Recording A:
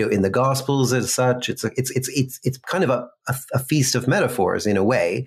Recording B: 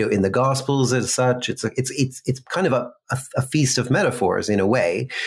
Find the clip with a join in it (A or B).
A